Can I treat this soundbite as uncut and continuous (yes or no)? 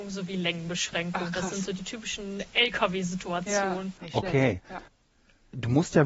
yes